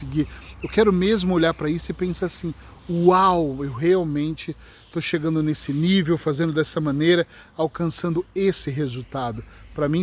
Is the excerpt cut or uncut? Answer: uncut